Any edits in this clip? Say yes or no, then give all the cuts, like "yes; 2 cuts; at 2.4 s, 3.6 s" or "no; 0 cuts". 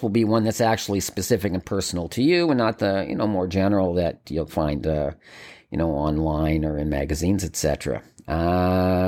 no; 0 cuts